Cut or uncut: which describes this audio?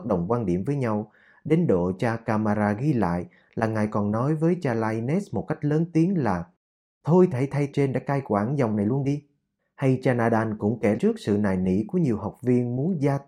cut